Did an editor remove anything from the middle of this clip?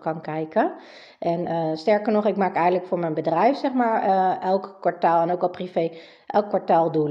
no; 0 cuts

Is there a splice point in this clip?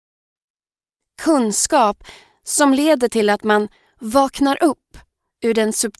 no; 0 cuts

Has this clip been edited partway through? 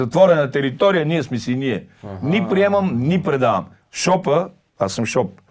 no; 0 cuts

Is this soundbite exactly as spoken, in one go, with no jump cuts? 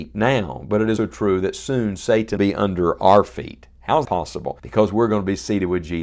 no; 4 cuts; at 1.0 s, 2.4 s, 4.0 s, 4.6 s

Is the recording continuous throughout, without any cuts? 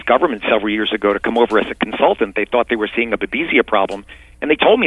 yes; 0 cuts

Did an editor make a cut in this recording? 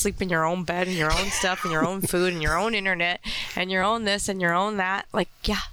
no; 0 cuts

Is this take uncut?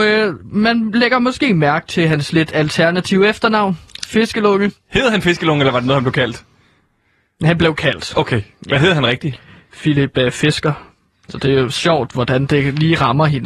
yes; 0 cuts

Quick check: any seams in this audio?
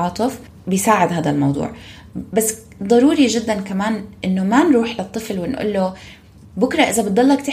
no; 0 cuts

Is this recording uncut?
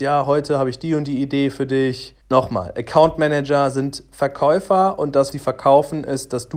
no; 2 cuts; at 2.2 s, 5.3 s

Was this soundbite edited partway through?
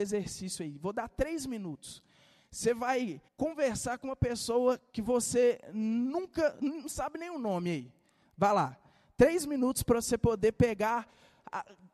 yes; 1 cut; at 3.3 s

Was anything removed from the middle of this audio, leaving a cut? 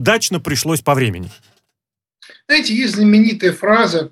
no; 0 cuts

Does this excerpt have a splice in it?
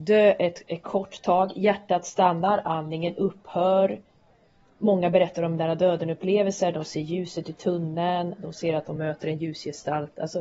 no; 0 cuts

